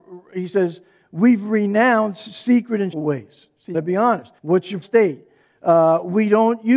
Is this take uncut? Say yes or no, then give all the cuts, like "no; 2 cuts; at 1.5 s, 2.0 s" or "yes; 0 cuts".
no; 4 cuts; at 2.9 s, 3.7 s, 4.4 s, 4.8 s